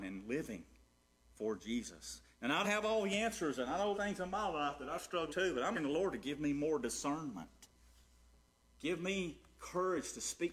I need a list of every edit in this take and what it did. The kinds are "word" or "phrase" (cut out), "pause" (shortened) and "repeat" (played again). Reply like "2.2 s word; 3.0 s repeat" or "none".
2.6 s word; 3.9 s word; 5.3 s word; 5.7 s word